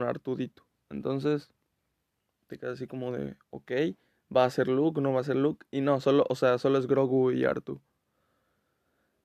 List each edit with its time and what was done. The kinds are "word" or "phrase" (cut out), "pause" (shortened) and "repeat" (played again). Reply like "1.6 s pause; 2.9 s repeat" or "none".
none